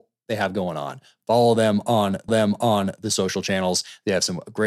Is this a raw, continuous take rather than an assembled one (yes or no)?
no